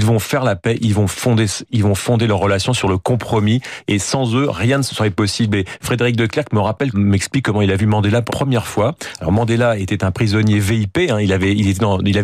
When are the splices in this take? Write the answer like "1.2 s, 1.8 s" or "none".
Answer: 6.9 s, 8.3 s